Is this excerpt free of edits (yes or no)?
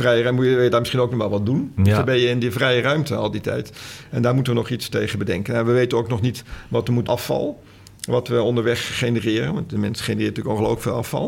no